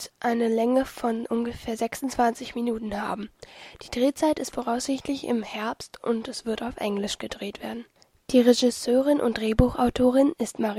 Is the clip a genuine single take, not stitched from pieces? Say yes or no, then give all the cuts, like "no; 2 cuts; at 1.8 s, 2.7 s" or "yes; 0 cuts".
yes; 0 cuts